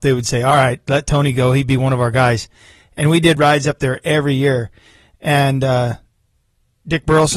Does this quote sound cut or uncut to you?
uncut